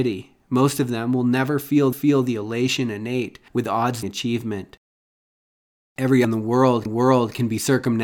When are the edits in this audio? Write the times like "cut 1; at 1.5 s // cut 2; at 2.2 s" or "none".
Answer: cut 1; at 1.9 s // cut 2; at 3.5 s // cut 3; at 4.0 s // cut 4; at 6.2 s // cut 5; at 6.9 s

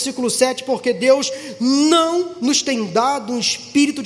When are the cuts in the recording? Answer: none

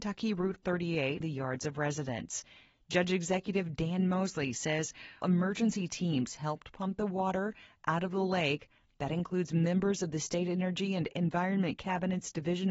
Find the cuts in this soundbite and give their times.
cut 1; at 1.2 s // cut 2; at 5.2 s

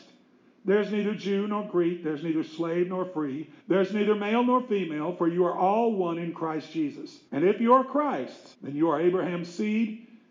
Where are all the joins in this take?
cut 1; at 3.6 s // cut 2; at 7.3 s // cut 3; at 8.5 s

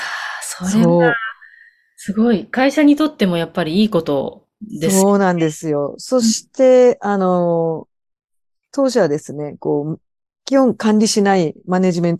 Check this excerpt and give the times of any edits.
none

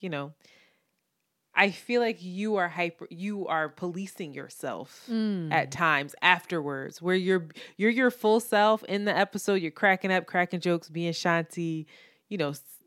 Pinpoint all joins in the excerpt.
none

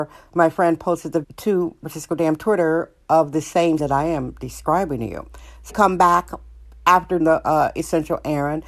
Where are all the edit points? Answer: cut 1; at 1.2 s // cut 2; at 1.8 s // cut 3; at 3.8 s // cut 4; at 5.7 s // cut 5; at 7.2 s

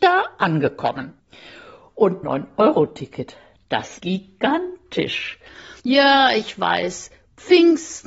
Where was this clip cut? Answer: cut 1; at 2.2 s // cut 2; at 4.0 s // cut 3; at 5.8 s

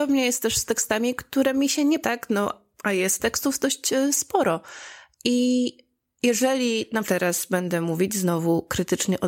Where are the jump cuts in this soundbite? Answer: cut 1; at 2.0 s // cut 2; at 3.2 s // cut 3; at 7.0 s

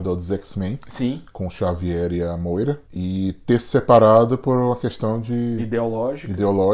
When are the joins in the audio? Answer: cut 1; at 2.8 s

